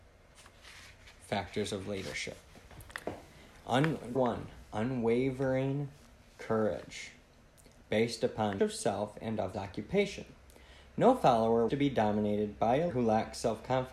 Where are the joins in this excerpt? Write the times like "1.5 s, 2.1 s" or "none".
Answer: 4.1 s, 8.6 s, 9.5 s, 11.7 s, 12.9 s